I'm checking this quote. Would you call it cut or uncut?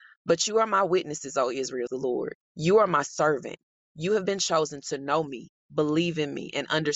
cut